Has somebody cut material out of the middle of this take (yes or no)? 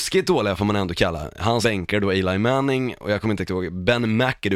yes